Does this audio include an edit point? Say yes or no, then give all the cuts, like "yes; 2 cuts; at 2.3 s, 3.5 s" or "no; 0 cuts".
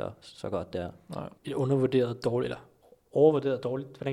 yes; 1 cut; at 1.4 s